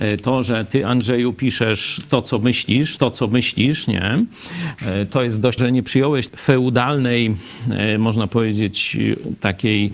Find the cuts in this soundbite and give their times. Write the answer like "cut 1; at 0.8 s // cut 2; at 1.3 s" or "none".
cut 1; at 3.0 s // cut 2; at 5.6 s // cut 3; at 6.3 s